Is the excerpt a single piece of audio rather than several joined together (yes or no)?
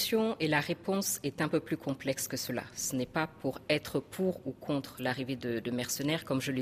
yes